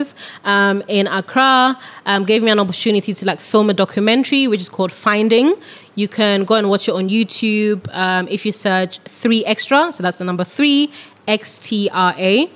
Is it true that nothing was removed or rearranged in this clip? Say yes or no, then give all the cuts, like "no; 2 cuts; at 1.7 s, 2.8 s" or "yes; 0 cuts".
yes; 0 cuts